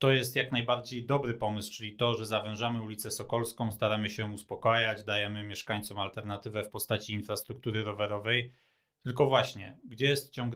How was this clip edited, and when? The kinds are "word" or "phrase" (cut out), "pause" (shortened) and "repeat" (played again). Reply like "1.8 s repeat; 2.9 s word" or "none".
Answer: none